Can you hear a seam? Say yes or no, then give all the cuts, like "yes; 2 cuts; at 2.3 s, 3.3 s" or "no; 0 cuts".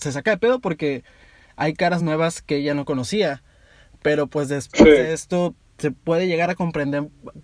no; 0 cuts